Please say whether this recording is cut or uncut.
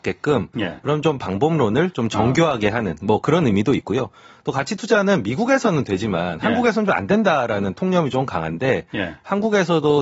uncut